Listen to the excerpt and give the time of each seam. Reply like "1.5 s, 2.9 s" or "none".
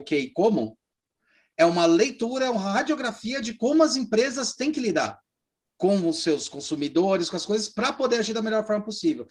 none